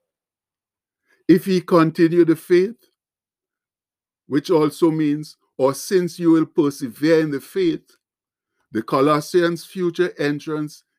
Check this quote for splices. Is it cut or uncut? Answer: uncut